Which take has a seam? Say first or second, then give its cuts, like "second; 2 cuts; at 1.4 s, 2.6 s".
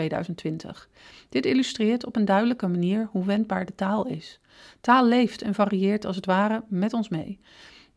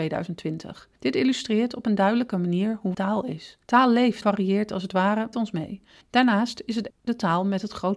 second; 7 cuts; at 1.0 s, 2.9 s, 3.6 s, 4.2 s, 5.3 s, 6.0 s, 6.9 s